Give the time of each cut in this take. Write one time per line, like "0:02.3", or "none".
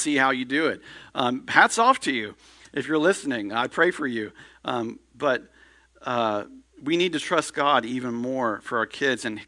none